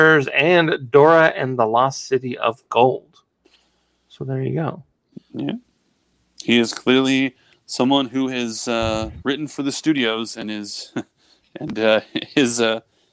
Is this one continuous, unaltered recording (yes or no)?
yes